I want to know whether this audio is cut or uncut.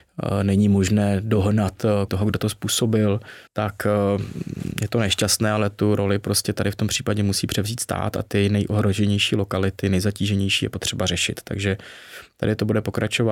cut